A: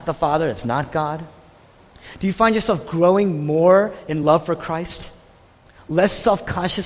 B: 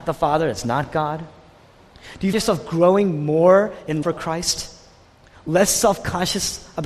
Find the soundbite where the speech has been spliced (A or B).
B